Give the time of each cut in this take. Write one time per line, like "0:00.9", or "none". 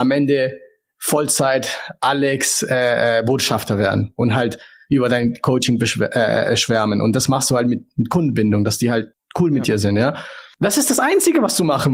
none